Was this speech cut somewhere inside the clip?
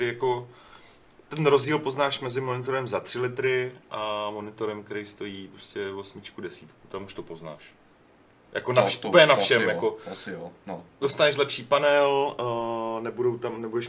no; 0 cuts

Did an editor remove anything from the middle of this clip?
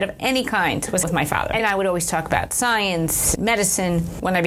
yes; 3 cuts; at 1.0 s, 1.6 s, 3.4 s

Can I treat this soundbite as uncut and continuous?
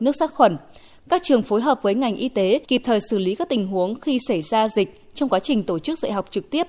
no; 1 cut; at 2.6 s

